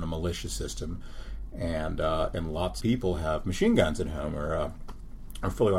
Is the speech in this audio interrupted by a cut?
yes; 1 cut; at 2.8 s

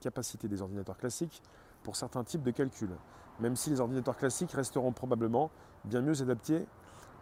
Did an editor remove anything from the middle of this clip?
no; 0 cuts

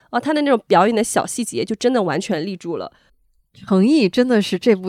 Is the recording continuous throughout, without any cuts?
no; 1 cut; at 3.1 s

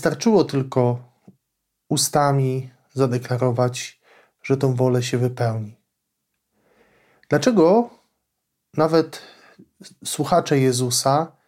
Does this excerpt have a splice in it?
no; 0 cuts

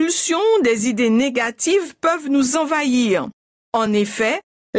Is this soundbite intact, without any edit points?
yes; 0 cuts

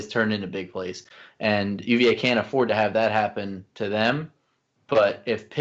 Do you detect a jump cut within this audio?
no; 0 cuts

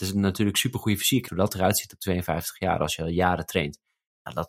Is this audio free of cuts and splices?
no; 1 cut; at 1.3 s

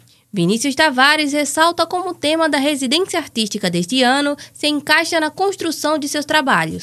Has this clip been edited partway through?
no; 0 cuts

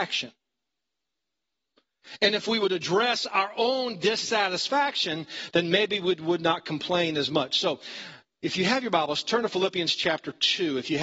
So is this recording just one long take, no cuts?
yes; 0 cuts

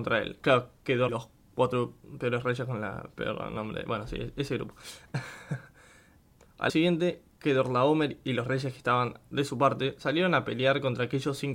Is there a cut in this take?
yes; 2 cuts; at 1.1 s, 6.7 s

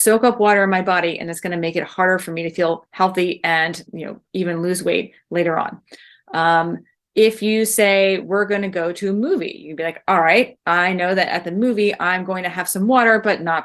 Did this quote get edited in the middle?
yes; 1 cut; at 3.9 s

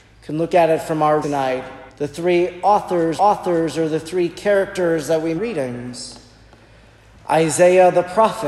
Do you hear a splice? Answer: yes; 4 cuts; at 1.2 s, 1.9 s, 3.2 s, 5.4 s

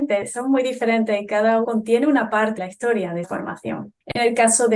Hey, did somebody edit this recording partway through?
yes; 3 cuts; at 1.6 s, 2.6 s, 3.2 s

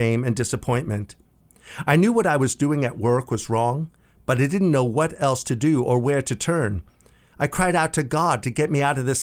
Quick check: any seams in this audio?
no; 0 cuts

